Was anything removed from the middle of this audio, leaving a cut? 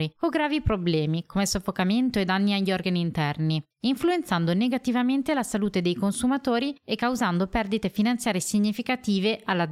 yes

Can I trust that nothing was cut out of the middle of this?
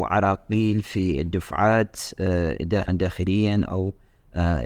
no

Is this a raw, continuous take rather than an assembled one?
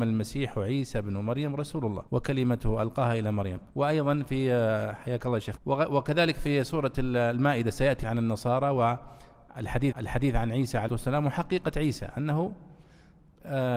no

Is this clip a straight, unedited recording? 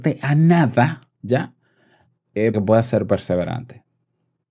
no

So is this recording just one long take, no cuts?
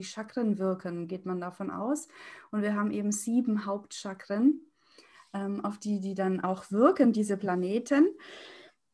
yes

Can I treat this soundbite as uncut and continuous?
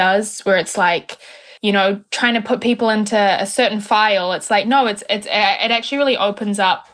no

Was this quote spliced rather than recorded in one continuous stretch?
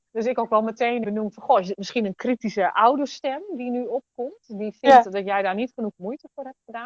yes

